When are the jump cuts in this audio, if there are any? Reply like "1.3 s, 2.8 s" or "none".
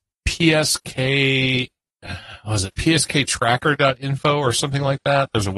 none